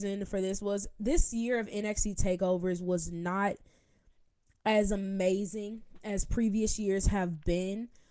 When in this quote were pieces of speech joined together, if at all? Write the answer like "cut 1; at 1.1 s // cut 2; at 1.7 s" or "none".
none